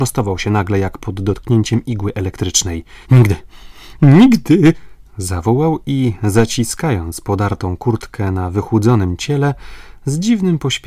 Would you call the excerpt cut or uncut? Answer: cut